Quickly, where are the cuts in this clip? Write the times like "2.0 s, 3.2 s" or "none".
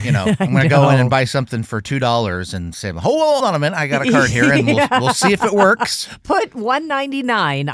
3.4 s